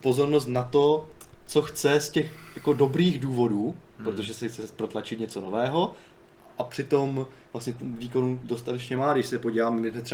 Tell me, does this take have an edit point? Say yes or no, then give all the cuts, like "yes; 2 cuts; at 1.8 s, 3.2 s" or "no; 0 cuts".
no; 0 cuts